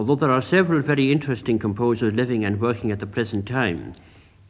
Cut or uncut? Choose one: uncut